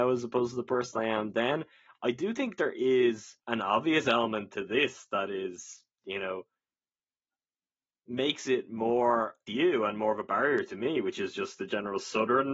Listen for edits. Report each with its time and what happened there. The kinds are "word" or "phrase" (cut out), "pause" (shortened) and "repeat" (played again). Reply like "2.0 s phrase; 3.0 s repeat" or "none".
3.4 s pause; 5.9 s pause; 9.5 s phrase